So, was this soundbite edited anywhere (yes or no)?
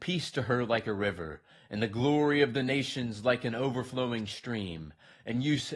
no